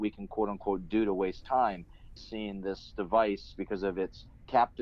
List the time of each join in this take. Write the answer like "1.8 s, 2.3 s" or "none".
2.2 s, 2.9 s